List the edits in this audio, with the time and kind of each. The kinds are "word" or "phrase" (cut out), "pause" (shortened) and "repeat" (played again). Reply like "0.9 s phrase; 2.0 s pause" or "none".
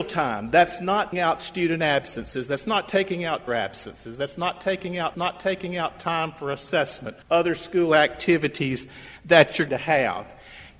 1.1 s word; 3.5 s word; 5.1 s repeat; 7.2 s pause; 9.7 s word